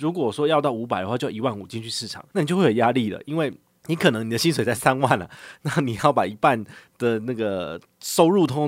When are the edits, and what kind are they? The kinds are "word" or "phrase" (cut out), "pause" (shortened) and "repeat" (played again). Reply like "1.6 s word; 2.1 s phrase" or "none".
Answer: 2.3 s pause; 3.6 s pause